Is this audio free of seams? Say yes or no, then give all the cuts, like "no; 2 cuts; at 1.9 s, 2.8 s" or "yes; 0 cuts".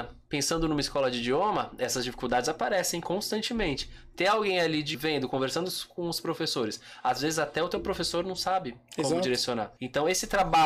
no; 2 cuts; at 4.9 s, 9.8 s